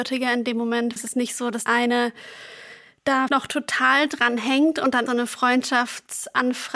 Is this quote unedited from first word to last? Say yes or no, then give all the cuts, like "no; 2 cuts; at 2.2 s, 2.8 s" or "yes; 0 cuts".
no; 4 cuts; at 1.0 s, 1.7 s, 3.3 s, 5.1 s